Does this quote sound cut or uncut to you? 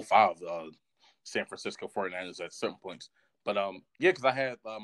uncut